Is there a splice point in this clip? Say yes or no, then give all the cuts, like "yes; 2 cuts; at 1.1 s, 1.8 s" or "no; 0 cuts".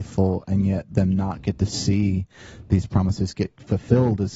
no; 0 cuts